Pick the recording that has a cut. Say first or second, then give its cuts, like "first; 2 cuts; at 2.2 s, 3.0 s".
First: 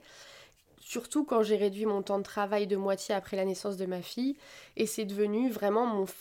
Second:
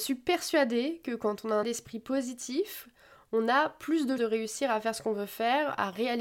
second; 2 cuts; at 1.6 s, 4.2 s